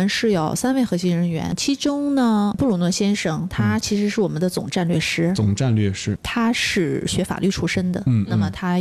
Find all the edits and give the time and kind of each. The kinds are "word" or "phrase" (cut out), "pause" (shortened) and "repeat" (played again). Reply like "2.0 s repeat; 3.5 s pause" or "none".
6.2 s word